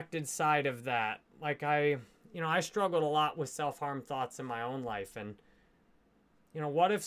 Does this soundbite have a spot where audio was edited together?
no; 0 cuts

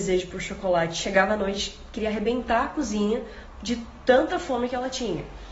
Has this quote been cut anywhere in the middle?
no; 0 cuts

